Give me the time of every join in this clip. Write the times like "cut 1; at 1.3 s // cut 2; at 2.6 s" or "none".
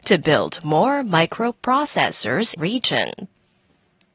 cut 1; at 2.6 s

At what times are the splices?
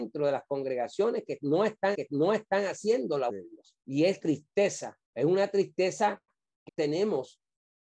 cut 1; at 1.9 s // cut 2; at 3.3 s // cut 3; at 3.8 s // cut 4; at 4.2 s // cut 5; at 5.0 s // cut 6; at 6.7 s

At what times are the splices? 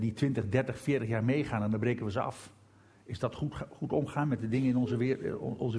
none

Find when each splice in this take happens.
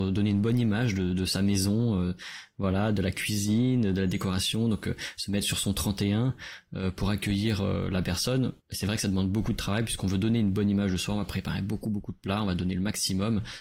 cut 1; at 8.6 s

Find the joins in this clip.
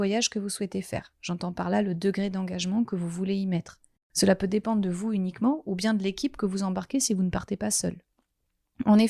cut 1; at 4.0 s

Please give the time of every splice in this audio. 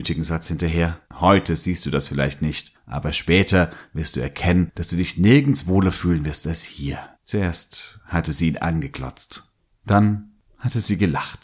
cut 1; at 1.0 s // cut 2; at 7.1 s // cut 3; at 9.7 s

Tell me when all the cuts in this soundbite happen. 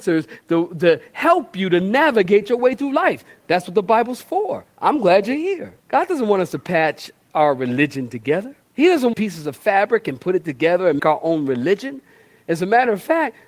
cut 1; at 5.8 s // cut 2; at 8.6 s // cut 3; at 9.1 s // cut 4; at 11.0 s

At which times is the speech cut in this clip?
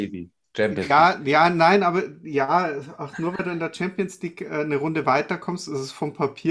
none

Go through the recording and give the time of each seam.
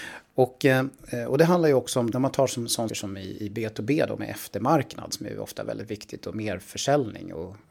cut 1; at 2.1 s // cut 2; at 2.9 s

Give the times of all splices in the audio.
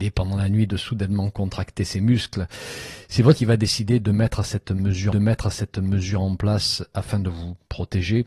cut 1; at 3.4 s // cut 2; at 5.1 s

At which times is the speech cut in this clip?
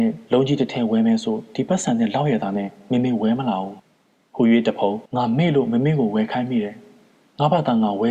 cut 1; at 3.8 s // cut 2; at 5.1 s

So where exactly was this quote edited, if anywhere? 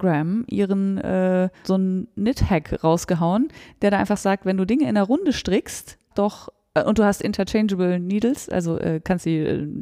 cut 1; at 1.6 s // cut 2; at 6.1 s

